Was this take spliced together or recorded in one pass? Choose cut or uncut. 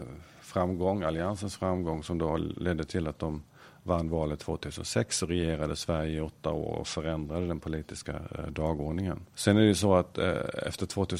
uncut